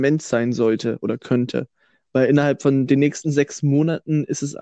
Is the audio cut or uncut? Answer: uncut